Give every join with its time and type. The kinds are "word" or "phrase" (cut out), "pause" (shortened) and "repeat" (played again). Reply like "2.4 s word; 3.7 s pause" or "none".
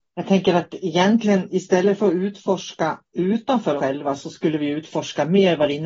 3.8 s word